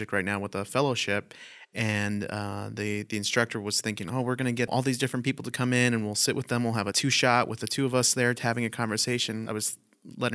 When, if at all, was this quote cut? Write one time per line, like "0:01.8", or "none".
none